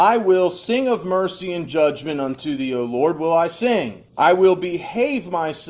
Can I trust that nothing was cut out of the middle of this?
no; 1 cut; at 4.1 s

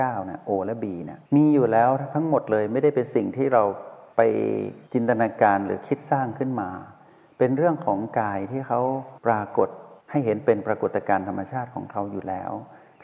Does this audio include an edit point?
yes; 1 cut; at 1.2 s

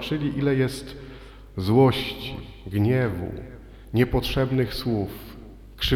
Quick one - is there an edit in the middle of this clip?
no; 0 cuts

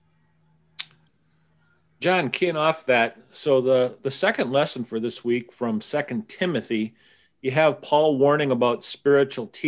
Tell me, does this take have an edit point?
no; 0 cuts

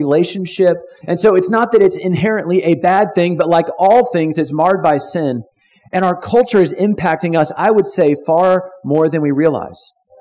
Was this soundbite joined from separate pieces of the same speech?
no; 0 cuts

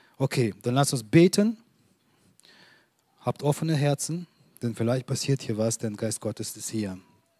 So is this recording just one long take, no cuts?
yes; 0 cuts

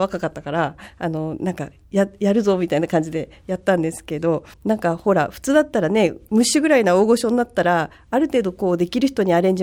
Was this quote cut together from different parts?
yes; 1 cut; at 4.5 s

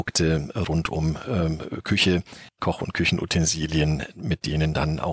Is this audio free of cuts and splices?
no; 1 cut; at 2.5 s

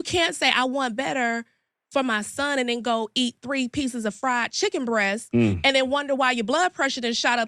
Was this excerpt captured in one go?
yes; 0 cuts

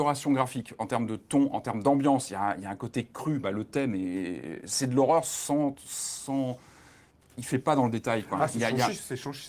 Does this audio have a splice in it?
no; 0 cuts

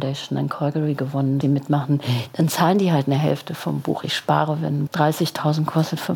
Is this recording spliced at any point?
yes; 2 cuts; at 1.4 s, 4.9 s

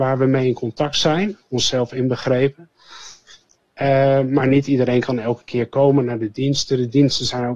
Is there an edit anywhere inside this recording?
no; 0 cuts

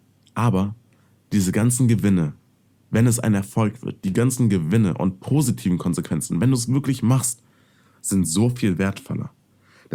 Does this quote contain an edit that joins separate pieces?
no; 0 cuts

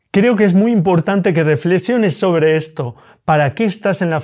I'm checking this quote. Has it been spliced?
no; 0 cuts

